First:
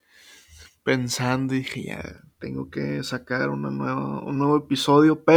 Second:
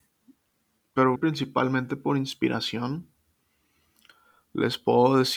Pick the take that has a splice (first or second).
second